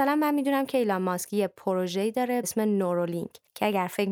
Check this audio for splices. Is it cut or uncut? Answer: cut